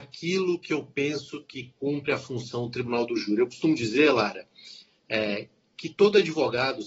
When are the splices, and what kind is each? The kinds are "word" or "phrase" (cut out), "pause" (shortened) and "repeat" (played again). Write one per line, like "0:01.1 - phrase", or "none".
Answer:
none